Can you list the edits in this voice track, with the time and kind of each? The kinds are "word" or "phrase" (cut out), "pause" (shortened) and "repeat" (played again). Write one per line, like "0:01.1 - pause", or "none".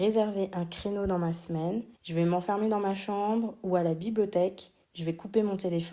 0:02.0 - pause
0:04.8 - pause